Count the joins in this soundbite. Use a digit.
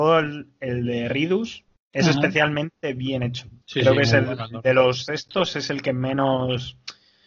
2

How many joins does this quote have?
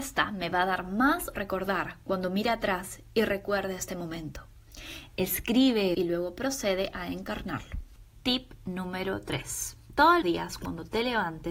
3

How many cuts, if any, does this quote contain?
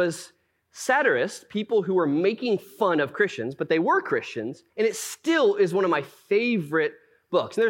1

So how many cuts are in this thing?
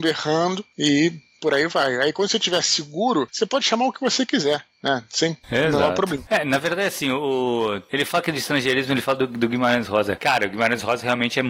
0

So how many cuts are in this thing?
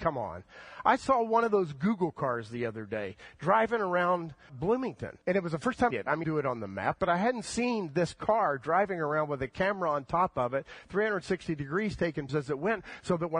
5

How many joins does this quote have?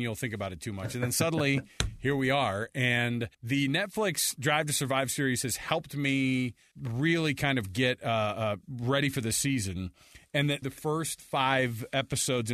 3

